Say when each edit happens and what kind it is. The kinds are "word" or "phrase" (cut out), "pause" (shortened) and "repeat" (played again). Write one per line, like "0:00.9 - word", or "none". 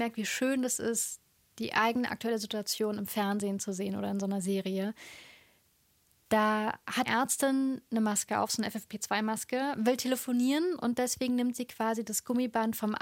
0:07.1 - word